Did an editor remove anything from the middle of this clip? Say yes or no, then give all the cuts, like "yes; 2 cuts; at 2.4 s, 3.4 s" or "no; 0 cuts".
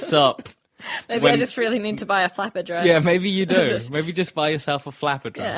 no; 0 cuts